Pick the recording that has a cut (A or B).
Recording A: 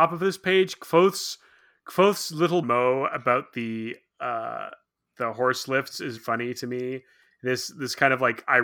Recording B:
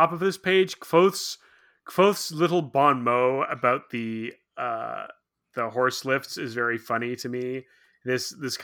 A